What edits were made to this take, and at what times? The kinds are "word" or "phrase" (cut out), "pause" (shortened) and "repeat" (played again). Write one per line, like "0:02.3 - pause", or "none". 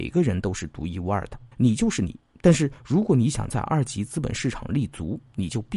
0:01.5 - pause